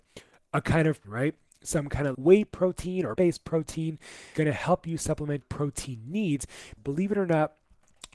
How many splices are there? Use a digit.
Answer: 6